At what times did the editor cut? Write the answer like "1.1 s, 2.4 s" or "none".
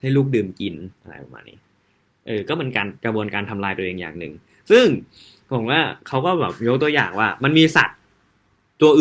0.9 s, 3.0 s